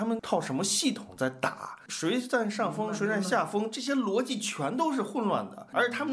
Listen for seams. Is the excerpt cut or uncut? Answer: uncut